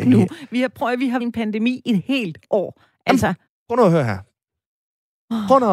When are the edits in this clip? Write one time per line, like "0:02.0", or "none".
0:01.2
0:03.5